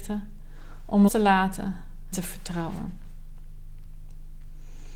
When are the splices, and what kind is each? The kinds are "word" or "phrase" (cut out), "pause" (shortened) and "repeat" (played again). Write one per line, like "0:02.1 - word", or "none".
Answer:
0:01.1 - word
0:02.1 - word